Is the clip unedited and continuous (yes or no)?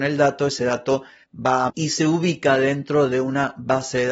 no